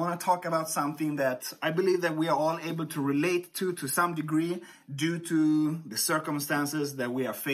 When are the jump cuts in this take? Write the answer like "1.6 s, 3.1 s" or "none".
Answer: none